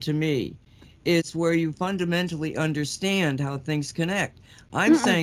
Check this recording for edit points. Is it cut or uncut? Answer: uncut